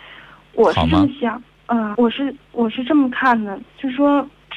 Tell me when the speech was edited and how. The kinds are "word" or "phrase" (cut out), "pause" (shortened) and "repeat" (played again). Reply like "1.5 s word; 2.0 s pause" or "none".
1.9 s word